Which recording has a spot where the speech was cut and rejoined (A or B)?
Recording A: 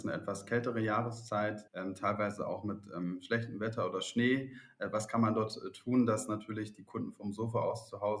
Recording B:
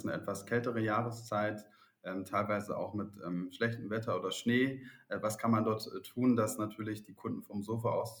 A